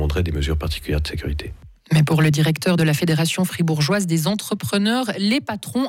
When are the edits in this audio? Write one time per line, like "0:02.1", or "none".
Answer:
none